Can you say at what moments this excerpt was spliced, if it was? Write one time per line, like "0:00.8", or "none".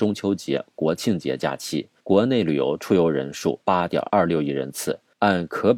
0:02.0